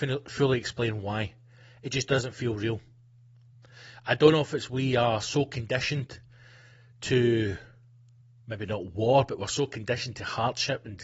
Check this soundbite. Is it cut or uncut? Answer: uncut